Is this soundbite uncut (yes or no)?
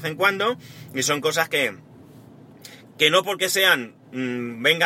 yes